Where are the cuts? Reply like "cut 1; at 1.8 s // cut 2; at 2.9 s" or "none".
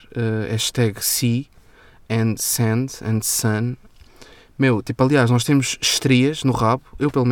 none